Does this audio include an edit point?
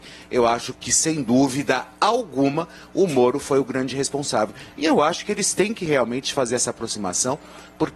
no; 0 cuts

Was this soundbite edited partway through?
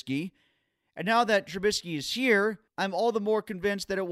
yes; 1 cut; at 2.7 s

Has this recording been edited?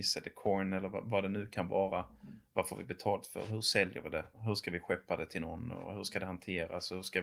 yes; 1 cut; at 4.3 s

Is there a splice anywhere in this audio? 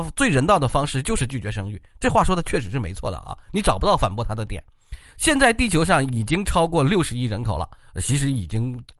no; 0 cuts

